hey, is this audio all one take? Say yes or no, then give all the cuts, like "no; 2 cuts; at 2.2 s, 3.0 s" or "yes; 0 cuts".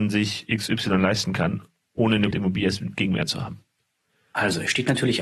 no; 1 cut; at 2.3 s